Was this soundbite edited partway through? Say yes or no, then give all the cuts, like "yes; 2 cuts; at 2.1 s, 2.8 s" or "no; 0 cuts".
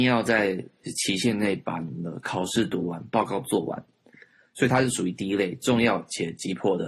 no; 0 cuts